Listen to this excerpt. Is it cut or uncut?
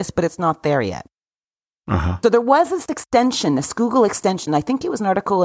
uncut